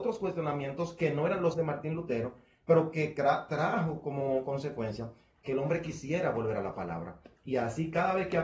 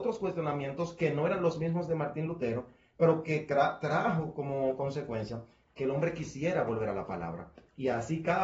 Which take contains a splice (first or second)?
first